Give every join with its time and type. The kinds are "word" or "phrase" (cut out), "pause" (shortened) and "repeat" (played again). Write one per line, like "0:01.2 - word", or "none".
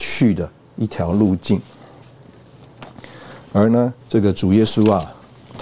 0:04.0 - pause